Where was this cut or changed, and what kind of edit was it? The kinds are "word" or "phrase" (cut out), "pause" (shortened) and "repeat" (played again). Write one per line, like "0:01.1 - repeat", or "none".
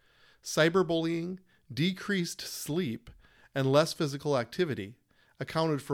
none